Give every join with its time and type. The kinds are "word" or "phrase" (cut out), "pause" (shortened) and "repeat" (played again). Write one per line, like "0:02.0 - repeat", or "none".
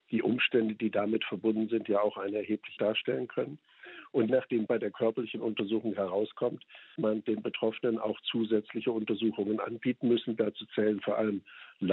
0:02.8 - word
0:04.3 - word
0:04.7 - word
0:07.0 - word